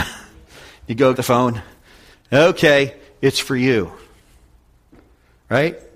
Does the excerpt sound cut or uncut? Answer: cut